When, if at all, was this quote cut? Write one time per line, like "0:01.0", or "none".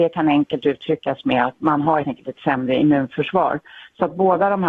0:02.0